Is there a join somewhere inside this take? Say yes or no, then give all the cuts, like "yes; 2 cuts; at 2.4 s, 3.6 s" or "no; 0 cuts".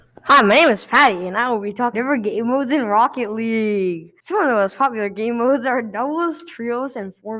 yes; 2 cuts; at 1.9 s, 4.2 s